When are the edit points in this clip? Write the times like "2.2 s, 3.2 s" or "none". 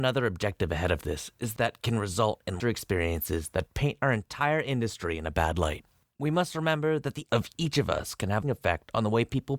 1.6 s, 2.6 s, 7.3 s, 8.4 s